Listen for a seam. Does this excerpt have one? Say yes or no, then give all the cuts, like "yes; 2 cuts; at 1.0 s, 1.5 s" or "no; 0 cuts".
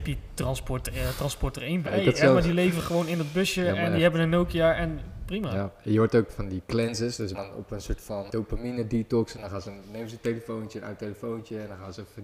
yes; 4 cuts; at 1.9 s, 6.3 s, 7.3 s, 8.3 s